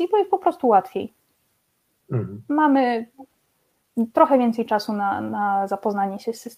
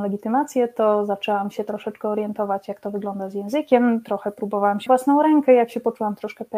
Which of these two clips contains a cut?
second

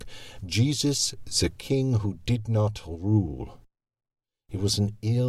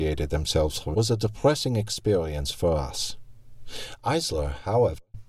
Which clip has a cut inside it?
second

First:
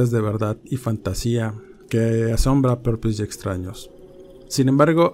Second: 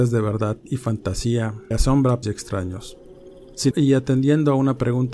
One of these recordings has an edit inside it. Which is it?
second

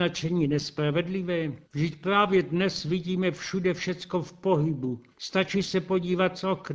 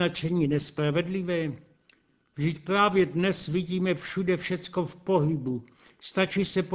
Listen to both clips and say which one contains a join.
first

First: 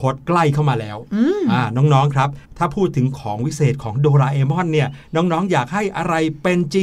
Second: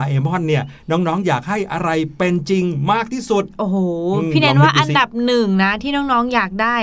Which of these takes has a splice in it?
first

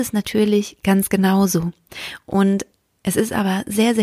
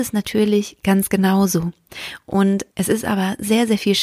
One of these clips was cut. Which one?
second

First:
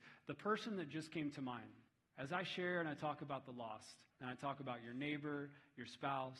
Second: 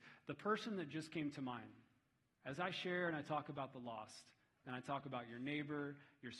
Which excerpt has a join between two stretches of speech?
first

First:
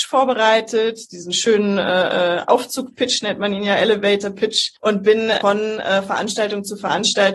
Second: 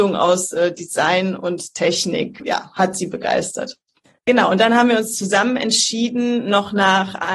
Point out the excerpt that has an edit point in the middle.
first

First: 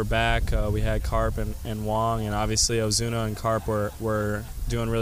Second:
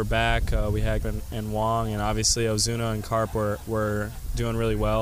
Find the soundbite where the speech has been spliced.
second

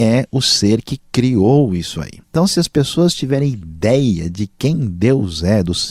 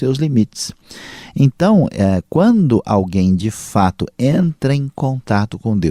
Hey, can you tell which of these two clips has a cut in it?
first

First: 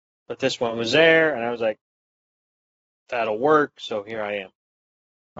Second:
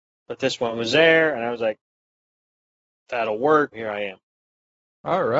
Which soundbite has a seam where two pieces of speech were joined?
second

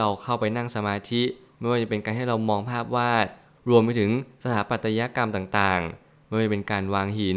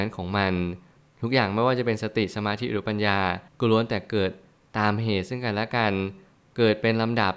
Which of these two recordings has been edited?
second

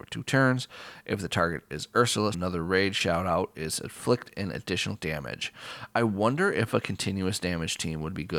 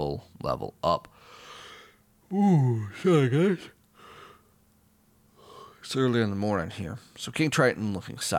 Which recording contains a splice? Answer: first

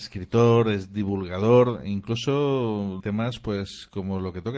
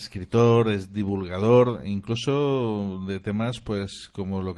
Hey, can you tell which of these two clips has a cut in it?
first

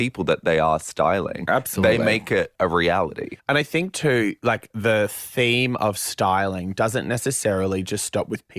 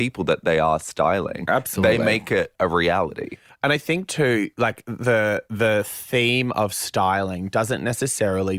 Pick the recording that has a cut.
first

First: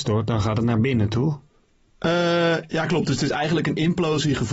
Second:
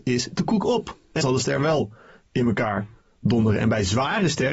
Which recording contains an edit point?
second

